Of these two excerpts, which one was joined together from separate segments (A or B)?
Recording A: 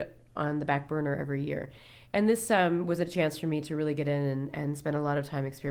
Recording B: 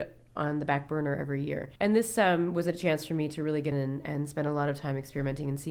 B